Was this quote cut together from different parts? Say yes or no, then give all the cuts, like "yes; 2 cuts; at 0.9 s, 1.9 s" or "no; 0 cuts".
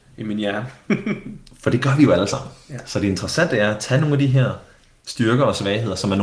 no; 0 cuts